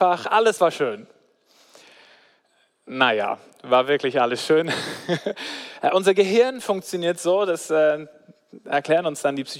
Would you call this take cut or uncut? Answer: uncut